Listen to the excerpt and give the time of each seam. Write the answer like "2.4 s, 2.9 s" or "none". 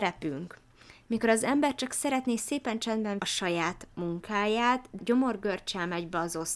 3.2 s, 5.0 s